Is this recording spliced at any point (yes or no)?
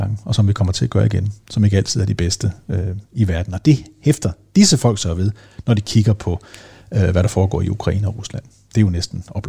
no